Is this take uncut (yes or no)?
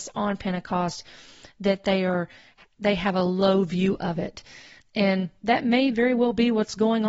yes